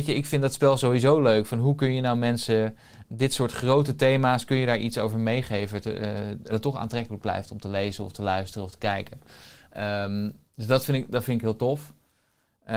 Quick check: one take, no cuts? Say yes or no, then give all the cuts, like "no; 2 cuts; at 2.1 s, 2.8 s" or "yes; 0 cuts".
no; 1 cut; at 6.5 s